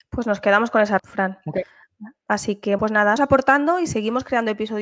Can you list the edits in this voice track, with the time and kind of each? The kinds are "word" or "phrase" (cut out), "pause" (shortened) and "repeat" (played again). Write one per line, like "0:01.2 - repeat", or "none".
0:01.0 - word
0:02.8 - word
0:03.2 - phrase